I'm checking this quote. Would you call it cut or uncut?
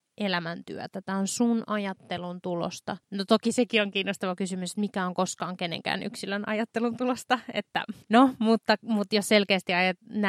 cut